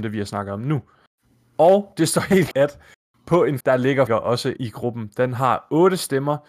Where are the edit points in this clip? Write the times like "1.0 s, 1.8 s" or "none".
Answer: 2.5 s, 3.6 s, 4.1 s, 4.6 s